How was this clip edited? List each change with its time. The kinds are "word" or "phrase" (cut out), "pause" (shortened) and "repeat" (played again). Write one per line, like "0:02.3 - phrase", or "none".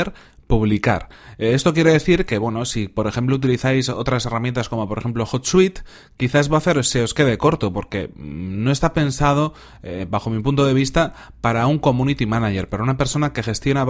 none

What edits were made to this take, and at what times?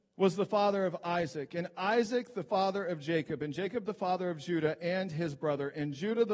none

